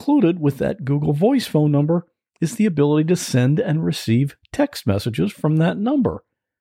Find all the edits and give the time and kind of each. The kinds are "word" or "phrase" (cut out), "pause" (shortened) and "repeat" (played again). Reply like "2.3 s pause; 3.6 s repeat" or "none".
none